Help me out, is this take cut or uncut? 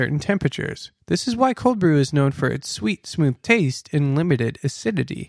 cut